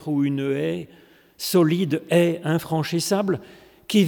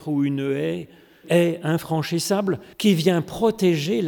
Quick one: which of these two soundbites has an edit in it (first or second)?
second